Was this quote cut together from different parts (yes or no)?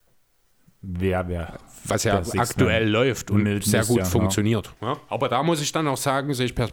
yes